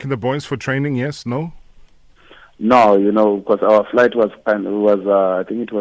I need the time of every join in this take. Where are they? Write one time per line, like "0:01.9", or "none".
none